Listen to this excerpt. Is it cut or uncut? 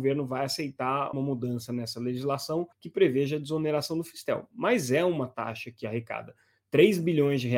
cut